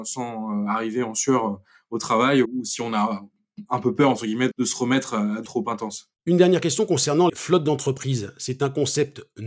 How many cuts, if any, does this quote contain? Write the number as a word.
four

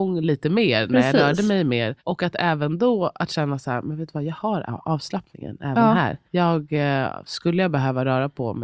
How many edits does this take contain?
two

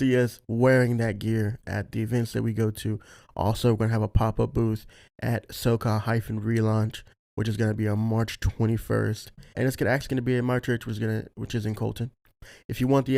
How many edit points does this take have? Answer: one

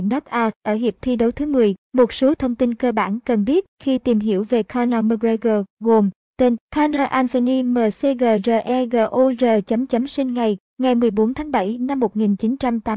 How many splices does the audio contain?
three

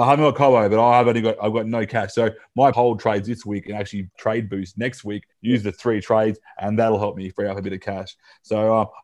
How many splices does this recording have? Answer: three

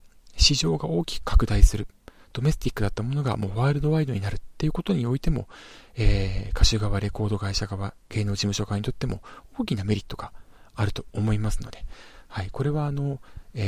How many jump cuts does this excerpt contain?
zero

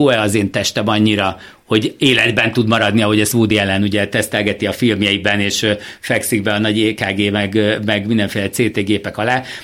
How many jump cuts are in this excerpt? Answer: zero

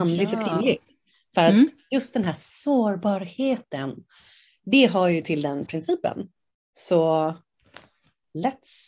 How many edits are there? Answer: one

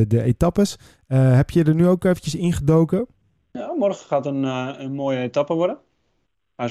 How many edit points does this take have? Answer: one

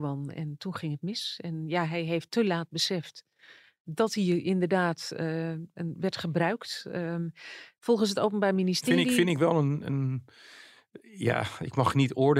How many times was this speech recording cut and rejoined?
zero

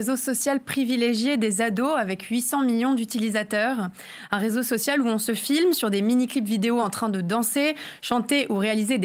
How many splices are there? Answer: zero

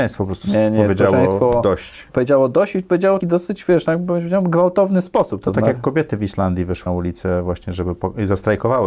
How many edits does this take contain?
two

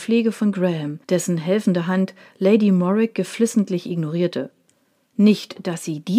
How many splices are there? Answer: one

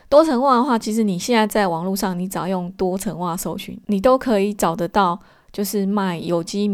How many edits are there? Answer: zero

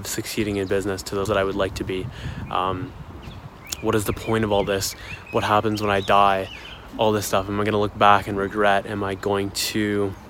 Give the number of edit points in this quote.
one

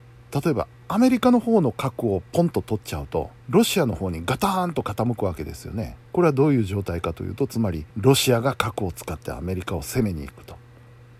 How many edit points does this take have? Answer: three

